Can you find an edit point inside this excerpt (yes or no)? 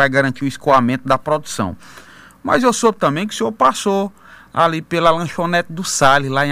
no